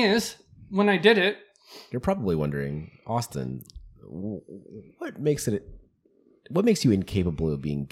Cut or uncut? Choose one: uncut